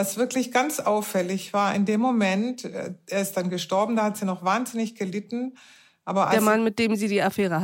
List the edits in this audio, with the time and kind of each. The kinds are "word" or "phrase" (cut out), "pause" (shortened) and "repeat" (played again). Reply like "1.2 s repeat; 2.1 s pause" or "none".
none